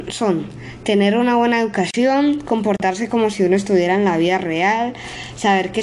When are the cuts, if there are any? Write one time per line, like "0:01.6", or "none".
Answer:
none